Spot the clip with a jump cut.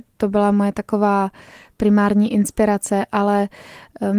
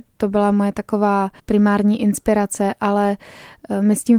second; 1 cut; at 1.4 s

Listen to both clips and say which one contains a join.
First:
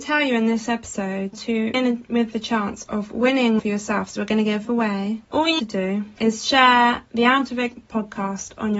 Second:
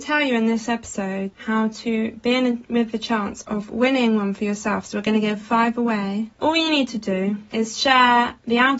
first; 5 cuts; at 1.3 s, 1.7 s, 3.6 s, 4.6 s, 5.6 s

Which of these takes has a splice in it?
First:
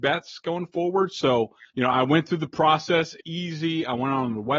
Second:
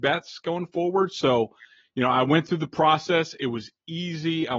first; 2 cuts; at 1.7 s, 3.2 s

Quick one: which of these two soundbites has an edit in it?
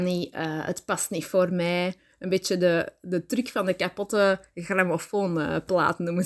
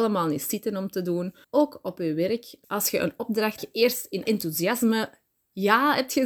second; 4 cuts; at 1.4 s, 2.6 s, 3.6 s, 4.2 s

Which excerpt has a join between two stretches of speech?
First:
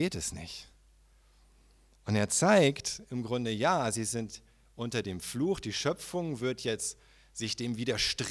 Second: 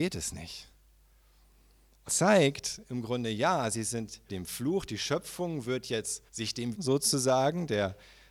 second; 4 cuts; at 2.1 s, 4.3 s, 6.3 s, 6.7 s

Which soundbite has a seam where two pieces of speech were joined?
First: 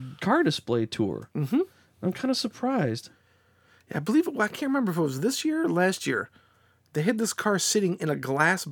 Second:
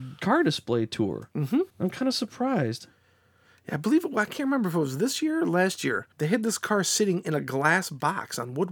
second; 2 cuts; at 1.7 s, 6.1 s

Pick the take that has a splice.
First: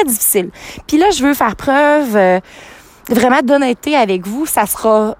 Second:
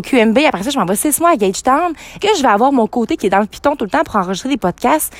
second; 2 cuts; at 2.2 s, 3.2 s

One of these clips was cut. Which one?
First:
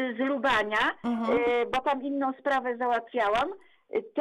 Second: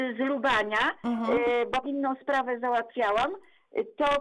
second; 1 cut; at 1.8 s

